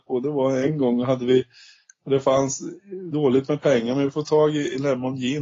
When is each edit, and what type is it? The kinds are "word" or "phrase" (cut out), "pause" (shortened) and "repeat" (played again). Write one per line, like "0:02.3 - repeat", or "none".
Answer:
none